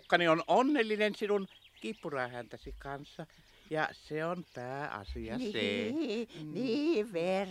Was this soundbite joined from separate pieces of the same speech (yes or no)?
no